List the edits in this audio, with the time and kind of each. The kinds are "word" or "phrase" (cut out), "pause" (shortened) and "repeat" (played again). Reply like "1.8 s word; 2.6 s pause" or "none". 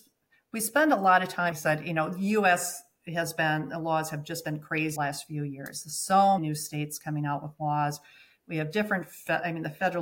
1.5 s word; 5.0 s word; 6.4 s word